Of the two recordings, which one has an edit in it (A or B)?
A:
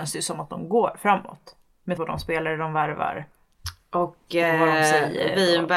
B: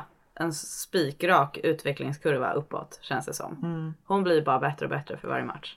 A